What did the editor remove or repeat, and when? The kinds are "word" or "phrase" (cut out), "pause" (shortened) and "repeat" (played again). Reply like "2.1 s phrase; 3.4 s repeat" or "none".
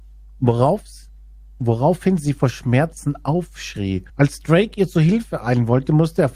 4.1 s pause